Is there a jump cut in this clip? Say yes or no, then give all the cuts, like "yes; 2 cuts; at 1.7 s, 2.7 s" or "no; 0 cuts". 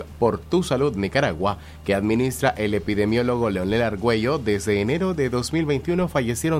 no; 0 cuts